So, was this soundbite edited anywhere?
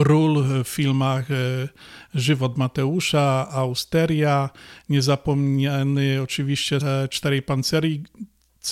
yes; 1 cut; at 6.8 s

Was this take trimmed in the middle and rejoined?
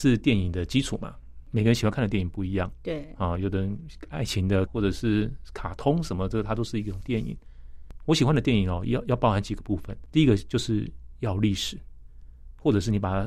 yes; 1 cut; at 4.7 s

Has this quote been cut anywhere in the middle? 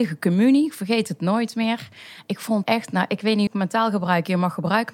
yes; 2 cuts; at 2.6 s, 3.5 s

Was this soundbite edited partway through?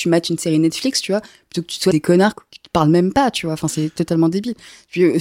yes; 1 cut; at 1.9 s

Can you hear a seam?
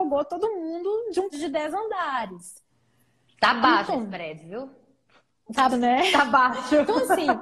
yes; 3 cuts; at 1.3 s, 3.9 s, 5.7 s

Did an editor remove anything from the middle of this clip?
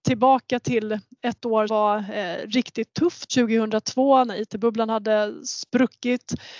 yes; 2 cuts; at 1.7 s, 3.3 s

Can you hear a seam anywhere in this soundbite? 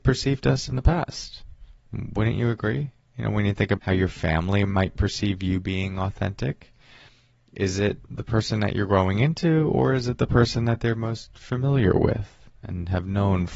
yes; 1 cut; at 3.8 s

